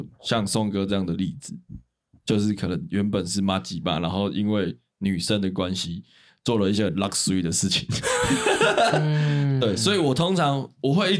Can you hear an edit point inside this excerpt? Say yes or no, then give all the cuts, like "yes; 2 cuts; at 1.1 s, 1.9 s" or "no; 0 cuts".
no; 0 cuts